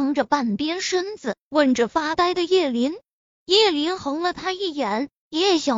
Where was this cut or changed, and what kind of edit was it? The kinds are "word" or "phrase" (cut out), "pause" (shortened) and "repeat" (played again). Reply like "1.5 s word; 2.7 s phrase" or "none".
3.3 s pause